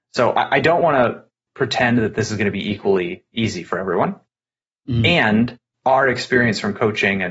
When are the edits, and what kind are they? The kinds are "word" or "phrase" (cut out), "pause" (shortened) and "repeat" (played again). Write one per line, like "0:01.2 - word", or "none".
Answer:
none

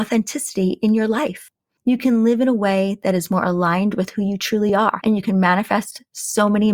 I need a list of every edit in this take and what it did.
none

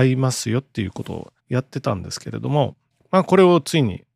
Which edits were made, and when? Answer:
0:01.4 - pause

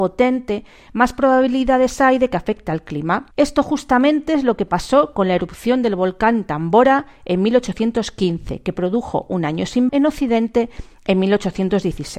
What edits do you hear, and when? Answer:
0:03.3 - pause
0:09.9 - word

